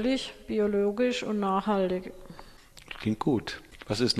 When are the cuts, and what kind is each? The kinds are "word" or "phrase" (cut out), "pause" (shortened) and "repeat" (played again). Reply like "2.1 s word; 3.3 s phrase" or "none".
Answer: none